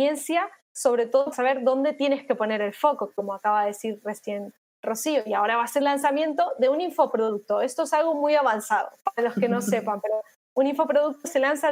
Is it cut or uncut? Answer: cut